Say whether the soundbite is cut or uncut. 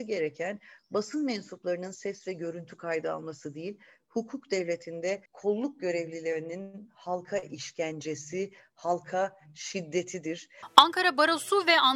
cut